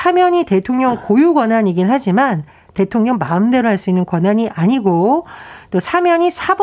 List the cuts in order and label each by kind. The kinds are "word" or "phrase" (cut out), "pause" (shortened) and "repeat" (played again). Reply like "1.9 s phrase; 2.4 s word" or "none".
none